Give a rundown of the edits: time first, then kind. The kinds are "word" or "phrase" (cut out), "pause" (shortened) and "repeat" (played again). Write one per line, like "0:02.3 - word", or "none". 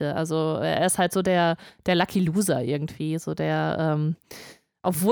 none